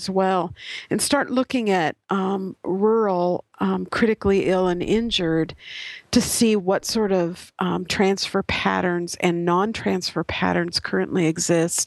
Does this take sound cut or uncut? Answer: uncut